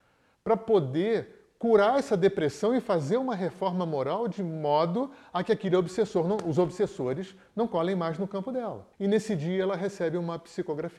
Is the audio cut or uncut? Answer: cut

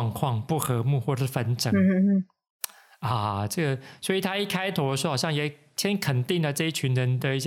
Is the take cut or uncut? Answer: uncut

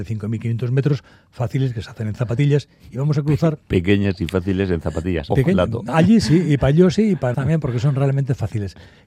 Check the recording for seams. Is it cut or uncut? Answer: cut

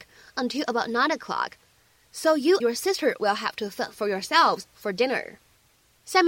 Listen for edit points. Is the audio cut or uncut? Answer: cut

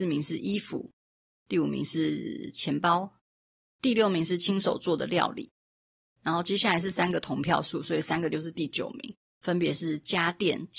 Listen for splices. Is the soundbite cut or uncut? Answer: uncut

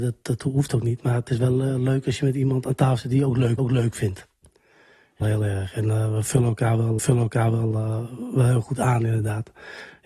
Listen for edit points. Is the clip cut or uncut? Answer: cut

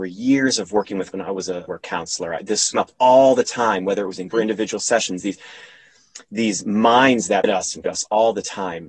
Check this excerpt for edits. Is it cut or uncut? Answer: cut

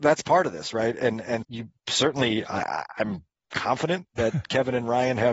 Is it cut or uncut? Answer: cut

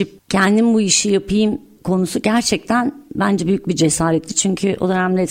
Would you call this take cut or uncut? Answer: uncut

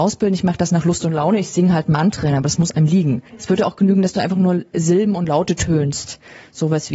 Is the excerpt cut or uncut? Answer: cut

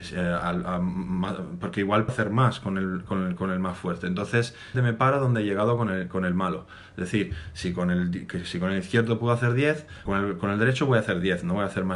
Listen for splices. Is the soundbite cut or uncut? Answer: cut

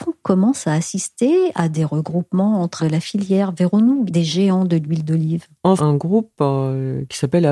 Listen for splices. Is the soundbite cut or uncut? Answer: cut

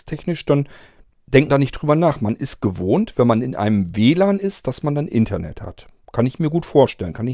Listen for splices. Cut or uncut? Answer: cut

